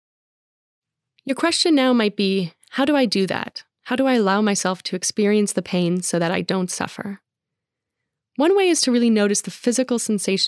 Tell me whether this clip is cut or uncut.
uncut